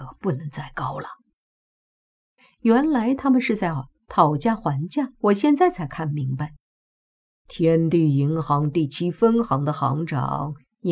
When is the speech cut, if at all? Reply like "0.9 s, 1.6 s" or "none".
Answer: 5.1 s, 7.2 s